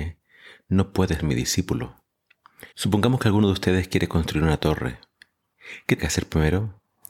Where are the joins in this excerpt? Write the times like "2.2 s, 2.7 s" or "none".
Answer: 1.2 s, 2.7 s, 6.0 s

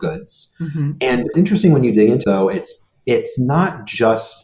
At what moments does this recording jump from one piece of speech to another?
1.3 s, 2.2 s

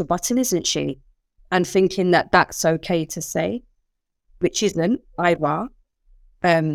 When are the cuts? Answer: 1.4 s

